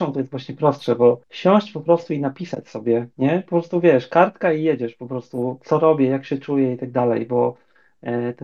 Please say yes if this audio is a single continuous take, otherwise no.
no